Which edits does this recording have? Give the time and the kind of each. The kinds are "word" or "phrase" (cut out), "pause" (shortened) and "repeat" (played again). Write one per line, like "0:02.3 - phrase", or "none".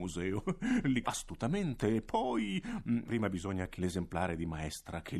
0:01.0 - word
0:03.1 - word
0:03.8 - word